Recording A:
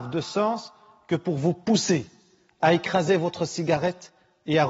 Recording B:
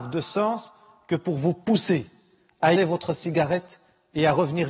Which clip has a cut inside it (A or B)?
B